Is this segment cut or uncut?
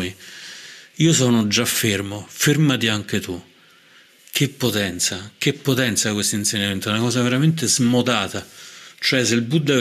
uncut